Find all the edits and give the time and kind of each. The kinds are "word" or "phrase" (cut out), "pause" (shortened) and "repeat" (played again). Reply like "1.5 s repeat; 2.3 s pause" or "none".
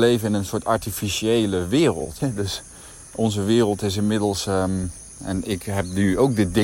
2.2 s word

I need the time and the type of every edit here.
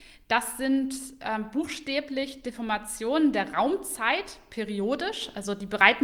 none

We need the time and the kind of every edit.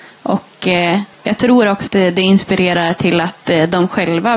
1.1 s pause; 1.9 s word

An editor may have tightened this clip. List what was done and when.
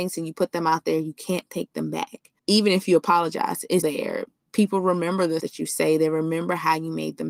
2.4 s pause; 3.8 s word; 5.4 s word

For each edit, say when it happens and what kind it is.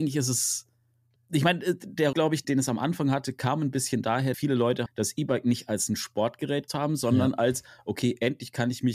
1.2 s word; 2.1 s word; 2.4 s word; 4.3 s word; 4.9 s word; 6.7 s word

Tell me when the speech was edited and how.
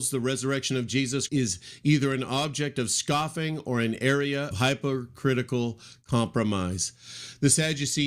1.3 s word; 4.5 s word

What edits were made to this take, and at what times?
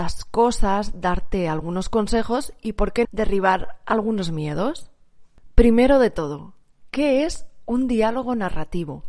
3.0 s word

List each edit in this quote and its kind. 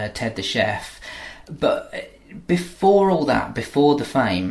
none

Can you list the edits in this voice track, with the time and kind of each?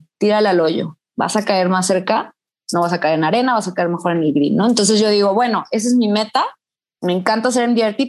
none

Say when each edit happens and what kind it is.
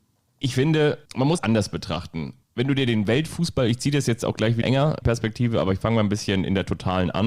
1.0 s pause; 1.4 s word; 2.4 s pause; 4.6 s phrase; 5.0 s word

